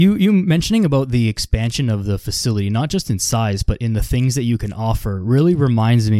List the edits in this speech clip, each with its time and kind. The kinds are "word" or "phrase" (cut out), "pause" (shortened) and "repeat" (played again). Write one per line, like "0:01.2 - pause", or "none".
none